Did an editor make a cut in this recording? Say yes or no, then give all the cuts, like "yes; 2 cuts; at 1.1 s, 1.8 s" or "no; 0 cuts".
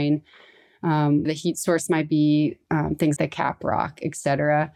yes; 2 cuts; at 1.3 s, 3.2 s